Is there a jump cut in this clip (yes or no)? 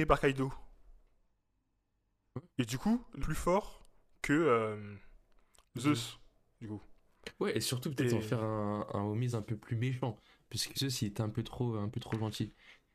yes